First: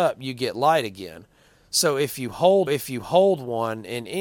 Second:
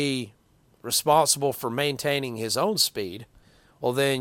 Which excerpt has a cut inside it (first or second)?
first